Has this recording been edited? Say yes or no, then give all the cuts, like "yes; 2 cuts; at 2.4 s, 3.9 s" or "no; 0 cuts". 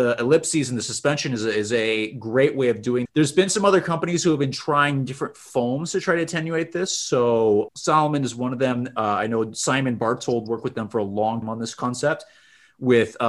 yes; 3 cuts; at 3.1 s, 7.7 s, 11.4 s